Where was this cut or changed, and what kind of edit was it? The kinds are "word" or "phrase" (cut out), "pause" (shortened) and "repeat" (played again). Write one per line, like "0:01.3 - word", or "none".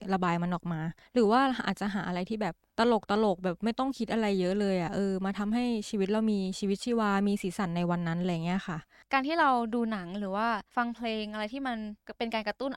0:10.7 - pause